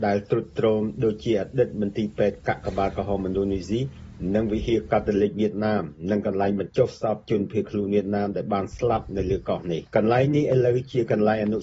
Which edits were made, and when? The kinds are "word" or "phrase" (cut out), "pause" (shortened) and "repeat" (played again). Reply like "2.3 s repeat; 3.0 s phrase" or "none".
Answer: 9.9 s pause